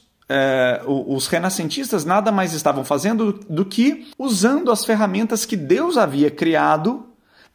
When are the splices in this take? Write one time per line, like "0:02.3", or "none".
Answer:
0:04.1